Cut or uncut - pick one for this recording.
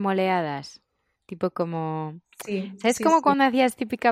uncut